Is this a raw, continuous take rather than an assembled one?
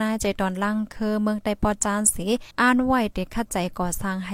no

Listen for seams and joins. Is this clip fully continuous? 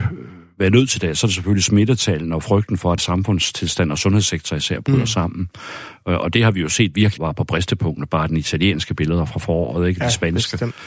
no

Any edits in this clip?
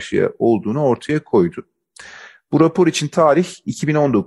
no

